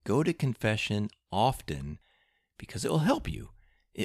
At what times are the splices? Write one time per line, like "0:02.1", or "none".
none